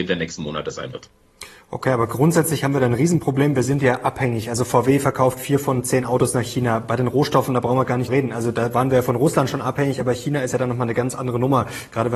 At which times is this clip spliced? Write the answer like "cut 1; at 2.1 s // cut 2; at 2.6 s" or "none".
cut 1; at 8.1 s